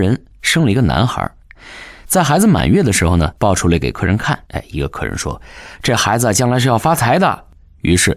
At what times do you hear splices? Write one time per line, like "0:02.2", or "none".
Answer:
0:03.4
0:04.5